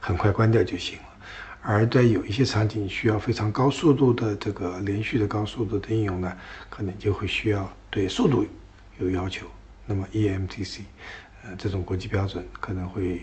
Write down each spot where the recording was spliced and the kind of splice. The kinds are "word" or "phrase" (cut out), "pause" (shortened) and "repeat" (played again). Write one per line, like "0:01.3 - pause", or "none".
none